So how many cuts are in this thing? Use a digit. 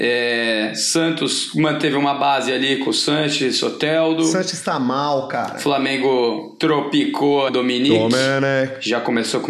1